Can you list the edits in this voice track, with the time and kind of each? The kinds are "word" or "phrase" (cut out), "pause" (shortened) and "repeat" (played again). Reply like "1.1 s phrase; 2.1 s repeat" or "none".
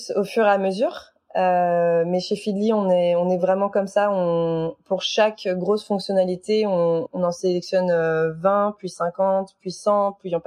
none